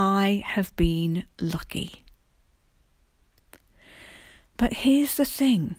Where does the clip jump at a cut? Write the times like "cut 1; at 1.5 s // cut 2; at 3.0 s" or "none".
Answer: cut 1; at 1.3 s